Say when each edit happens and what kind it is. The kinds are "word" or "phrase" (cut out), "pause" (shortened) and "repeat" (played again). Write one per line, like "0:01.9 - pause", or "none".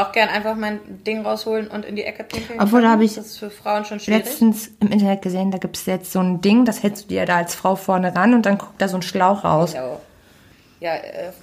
none